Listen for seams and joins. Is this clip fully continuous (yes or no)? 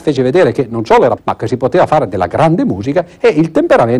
no